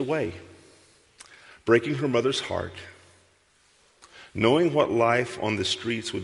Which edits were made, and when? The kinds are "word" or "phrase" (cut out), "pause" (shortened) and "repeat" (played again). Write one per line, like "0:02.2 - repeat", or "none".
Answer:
none